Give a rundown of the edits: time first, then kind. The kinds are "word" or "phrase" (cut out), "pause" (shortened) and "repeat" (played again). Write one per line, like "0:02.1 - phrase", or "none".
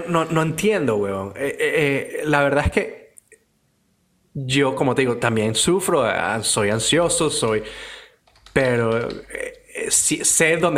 none